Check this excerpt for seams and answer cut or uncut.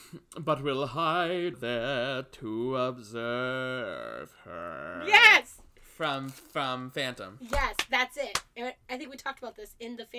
cut